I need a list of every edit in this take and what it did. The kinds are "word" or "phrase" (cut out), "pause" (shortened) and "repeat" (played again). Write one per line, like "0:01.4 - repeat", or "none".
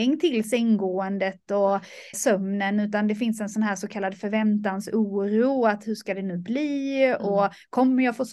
0:02.1 - word